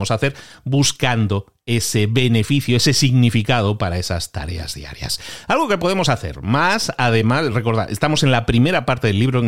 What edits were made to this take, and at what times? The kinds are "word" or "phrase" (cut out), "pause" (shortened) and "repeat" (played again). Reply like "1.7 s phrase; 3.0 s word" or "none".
none

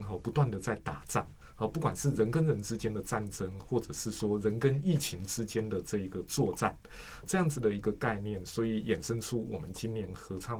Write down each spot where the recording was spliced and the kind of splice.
7.2 s word

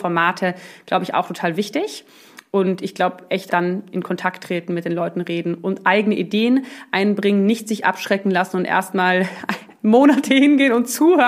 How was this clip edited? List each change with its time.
3.5 s word

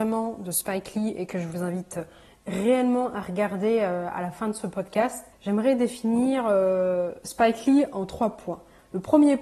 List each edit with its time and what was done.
5.3 s pause

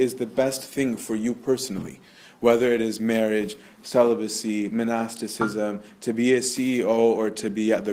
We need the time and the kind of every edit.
none

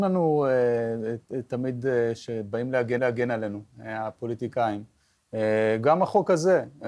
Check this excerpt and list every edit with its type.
3.0 s repeat

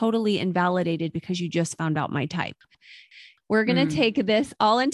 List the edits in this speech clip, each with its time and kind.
none

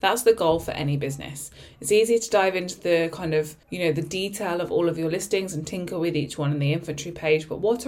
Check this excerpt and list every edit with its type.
3.6 s pause

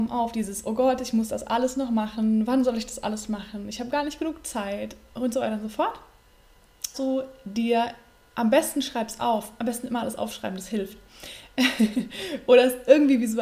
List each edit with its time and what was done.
6.9 s word

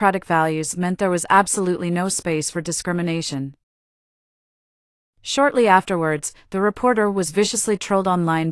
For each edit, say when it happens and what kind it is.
none

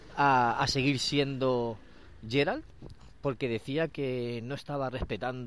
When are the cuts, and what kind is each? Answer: none

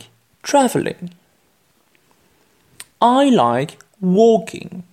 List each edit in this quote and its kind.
2.9 s pause

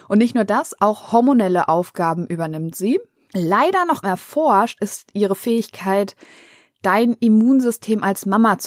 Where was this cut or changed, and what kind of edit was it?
4.0 s word

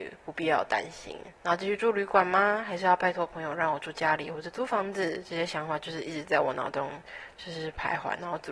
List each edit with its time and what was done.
1.4 s pause

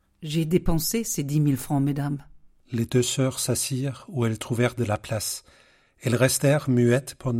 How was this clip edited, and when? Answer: 2.5 s pause

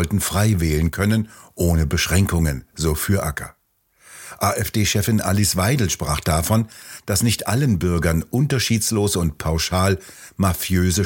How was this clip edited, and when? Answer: none

